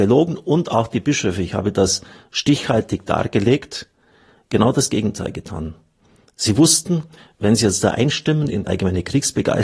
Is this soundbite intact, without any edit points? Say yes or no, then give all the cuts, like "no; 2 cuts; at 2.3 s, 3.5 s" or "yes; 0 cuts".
no; 1 cut; at 8.6 s